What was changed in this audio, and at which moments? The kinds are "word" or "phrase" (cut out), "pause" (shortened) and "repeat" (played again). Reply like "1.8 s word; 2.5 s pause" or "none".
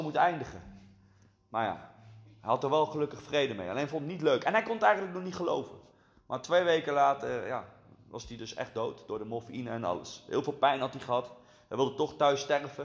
none